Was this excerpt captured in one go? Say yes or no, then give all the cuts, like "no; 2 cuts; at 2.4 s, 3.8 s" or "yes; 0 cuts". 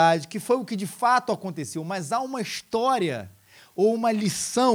yes; 0 cuts